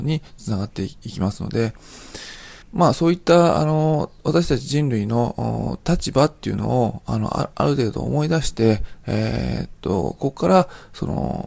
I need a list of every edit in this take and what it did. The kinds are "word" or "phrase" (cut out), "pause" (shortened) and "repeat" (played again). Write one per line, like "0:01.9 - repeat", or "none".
0:02.6 - pause